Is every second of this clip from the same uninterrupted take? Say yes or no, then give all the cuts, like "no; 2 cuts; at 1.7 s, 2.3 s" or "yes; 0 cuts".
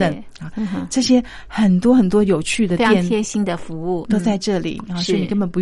no; 1 cut; at 4.0 s